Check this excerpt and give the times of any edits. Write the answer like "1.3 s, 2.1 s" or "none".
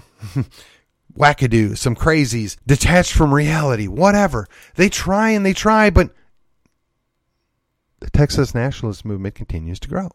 2.6 s